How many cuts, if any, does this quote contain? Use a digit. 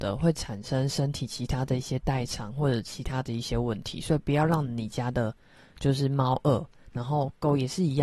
0